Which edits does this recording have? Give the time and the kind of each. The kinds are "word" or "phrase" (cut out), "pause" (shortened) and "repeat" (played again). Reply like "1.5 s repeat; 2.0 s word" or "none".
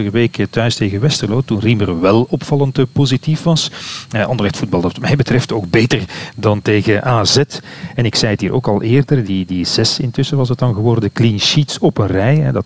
none